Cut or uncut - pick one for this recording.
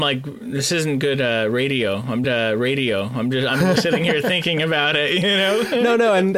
cut